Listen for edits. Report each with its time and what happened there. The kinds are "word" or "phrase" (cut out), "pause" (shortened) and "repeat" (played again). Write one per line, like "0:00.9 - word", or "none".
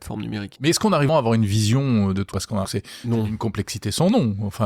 0:01.1 - word
0:02.3 - word
0:02.6 - word